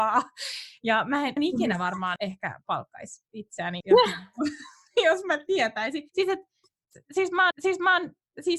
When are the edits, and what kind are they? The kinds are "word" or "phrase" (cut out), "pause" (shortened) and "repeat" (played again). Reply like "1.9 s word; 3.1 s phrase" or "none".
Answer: 1.4 s phrase; 2.2 s word; 3.8 s word; 6.1 s pause; 7.5 s repeat